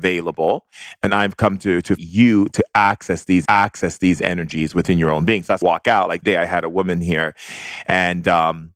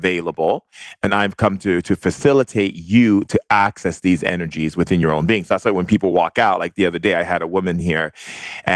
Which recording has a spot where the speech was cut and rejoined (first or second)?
first